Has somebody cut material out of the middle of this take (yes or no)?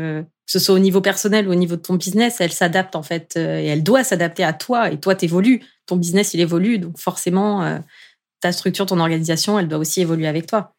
no